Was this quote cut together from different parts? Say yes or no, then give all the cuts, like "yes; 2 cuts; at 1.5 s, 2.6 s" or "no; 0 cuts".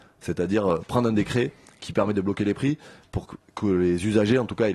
no; 0 cuts